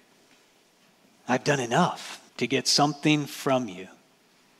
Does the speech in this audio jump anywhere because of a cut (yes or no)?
yes